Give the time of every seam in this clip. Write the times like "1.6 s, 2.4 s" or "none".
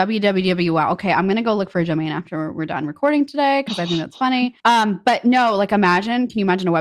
4.6 s